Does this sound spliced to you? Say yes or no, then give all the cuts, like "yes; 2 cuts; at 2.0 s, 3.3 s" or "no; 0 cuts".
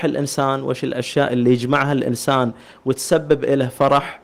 no; 0 cuts